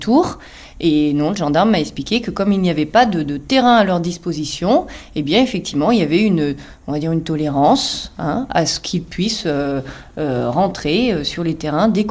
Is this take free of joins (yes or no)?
yes